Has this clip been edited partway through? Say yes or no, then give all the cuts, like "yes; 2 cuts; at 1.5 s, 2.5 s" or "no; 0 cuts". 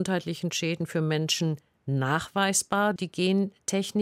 yes; 1 cut; at 3.0 s